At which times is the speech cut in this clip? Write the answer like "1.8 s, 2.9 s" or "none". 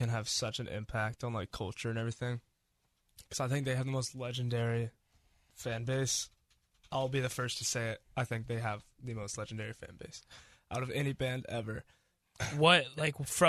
none

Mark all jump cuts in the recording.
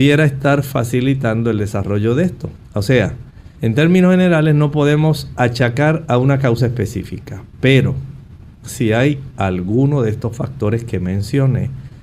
2.6 s, 3.5 s

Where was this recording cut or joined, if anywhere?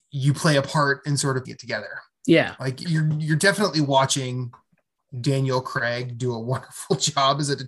1.4 s, 2.8 s

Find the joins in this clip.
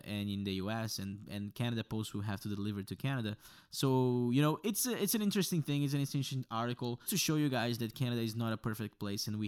7.1 s

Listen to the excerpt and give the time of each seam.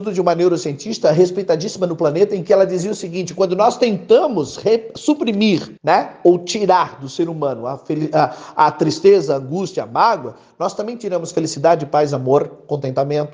5.8 s

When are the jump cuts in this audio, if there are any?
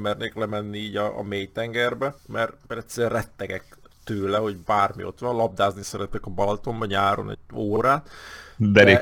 2.2 s

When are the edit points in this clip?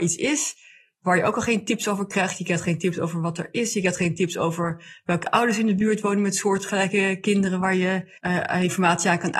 8.2 s

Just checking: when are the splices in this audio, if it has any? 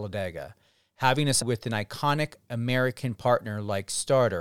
1.4 s

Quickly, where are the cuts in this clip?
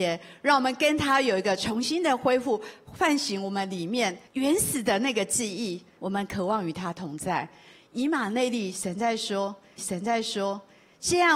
4.3 s, 6.0 s, 9.8 s

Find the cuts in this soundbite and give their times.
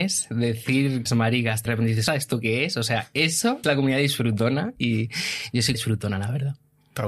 1.1 s, 1.7 s, 2.1 s, 3.6 s, 5.7 s

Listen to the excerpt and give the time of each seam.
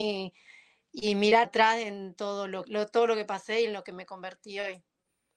1.4 s, 2.6 s

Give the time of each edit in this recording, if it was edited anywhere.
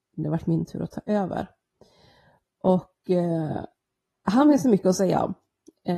none

